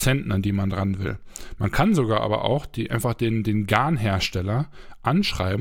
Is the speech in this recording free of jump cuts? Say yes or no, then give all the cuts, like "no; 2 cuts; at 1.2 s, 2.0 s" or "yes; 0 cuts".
yes; 0 cuts